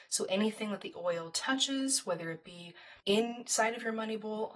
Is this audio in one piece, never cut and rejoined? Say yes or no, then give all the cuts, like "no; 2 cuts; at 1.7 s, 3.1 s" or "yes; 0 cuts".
no; 1 cut; at 3.0 s